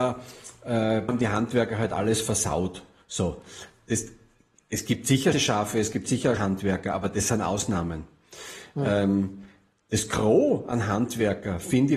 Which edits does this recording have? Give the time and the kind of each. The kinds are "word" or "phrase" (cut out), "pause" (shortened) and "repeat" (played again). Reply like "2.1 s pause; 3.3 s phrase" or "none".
1.1 s word; 5.3 s word; 6.4 s word

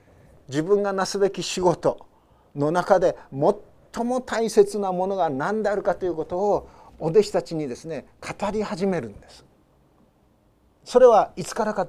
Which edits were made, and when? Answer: none

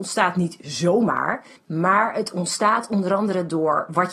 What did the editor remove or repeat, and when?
1.6 s pause

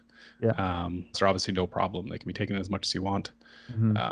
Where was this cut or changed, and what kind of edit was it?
1.1 s word

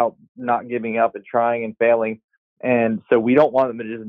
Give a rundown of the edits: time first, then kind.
none

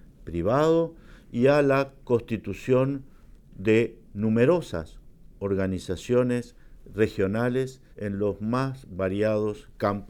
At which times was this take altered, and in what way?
4.0 s pause; 7.9 s pause

